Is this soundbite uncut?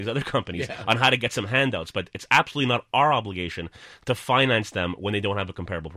yes; 0 cuts

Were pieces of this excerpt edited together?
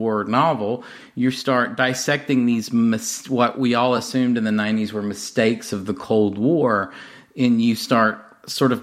no; 0 cuts

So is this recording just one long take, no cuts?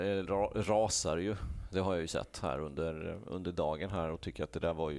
yes; 0 cuts

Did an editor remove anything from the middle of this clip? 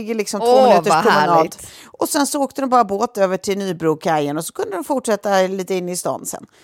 no; 0 cuts

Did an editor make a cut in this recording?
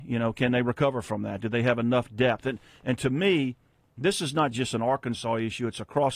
no; 0 cuts

